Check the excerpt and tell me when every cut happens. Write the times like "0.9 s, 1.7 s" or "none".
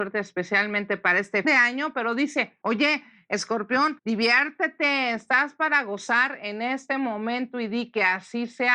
1.4 s